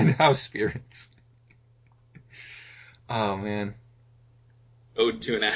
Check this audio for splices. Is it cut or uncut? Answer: uncut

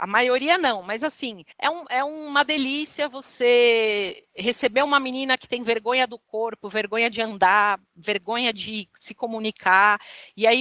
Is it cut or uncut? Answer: cut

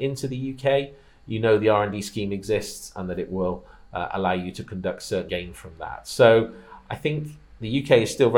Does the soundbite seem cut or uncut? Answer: cut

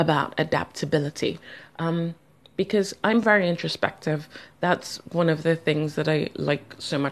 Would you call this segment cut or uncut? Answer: uncut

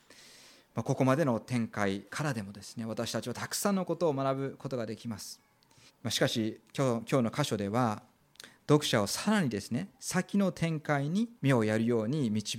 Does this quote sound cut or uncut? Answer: cut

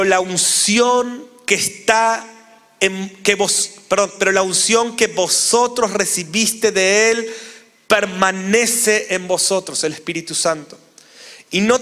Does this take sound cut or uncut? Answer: uncut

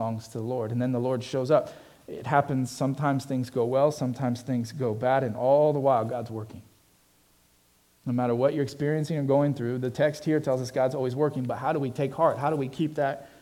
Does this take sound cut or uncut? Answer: uncut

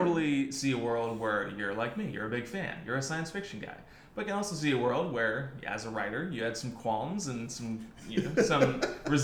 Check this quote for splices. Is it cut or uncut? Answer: uncut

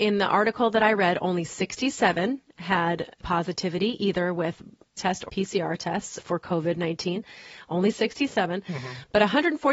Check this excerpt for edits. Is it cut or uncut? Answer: cut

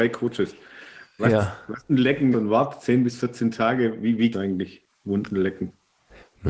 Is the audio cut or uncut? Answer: cut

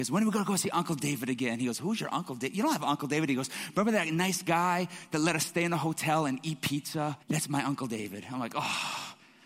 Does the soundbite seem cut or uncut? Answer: cut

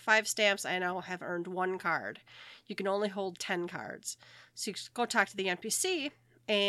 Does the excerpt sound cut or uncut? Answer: uncut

